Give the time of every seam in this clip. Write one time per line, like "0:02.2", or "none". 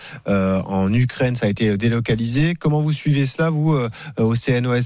none